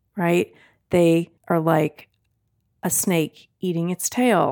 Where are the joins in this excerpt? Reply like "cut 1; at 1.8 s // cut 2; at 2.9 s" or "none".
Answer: cut 1; at 1.4 s